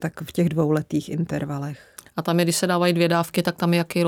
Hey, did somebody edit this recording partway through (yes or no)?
no